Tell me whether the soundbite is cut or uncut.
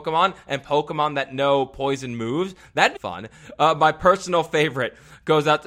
cut